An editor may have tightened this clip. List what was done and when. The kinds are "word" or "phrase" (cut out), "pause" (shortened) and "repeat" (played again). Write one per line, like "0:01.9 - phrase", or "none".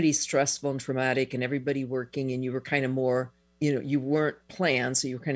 0:03.4 - pause